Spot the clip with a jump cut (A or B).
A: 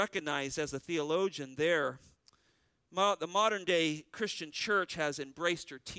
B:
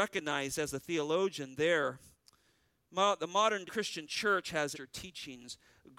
B